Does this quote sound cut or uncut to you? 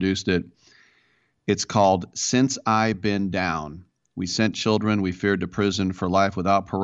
uncut